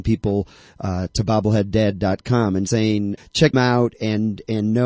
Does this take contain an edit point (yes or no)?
yes